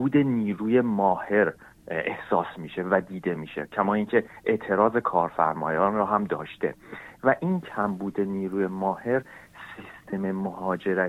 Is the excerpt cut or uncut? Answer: uncut